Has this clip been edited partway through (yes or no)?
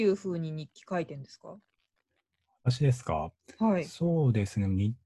no